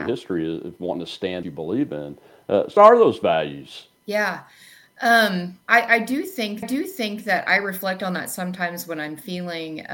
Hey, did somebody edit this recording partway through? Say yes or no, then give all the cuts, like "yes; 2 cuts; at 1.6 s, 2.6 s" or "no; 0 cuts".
yes; 5 cuts; at 1.4 s, 2.8 s, 4.0 s, 5.6 s, 6.6 s